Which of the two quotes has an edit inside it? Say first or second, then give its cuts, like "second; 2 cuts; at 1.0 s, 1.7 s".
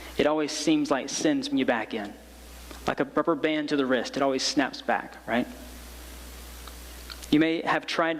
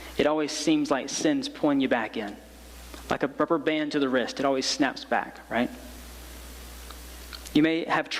first; 1 cut; at 1.5 s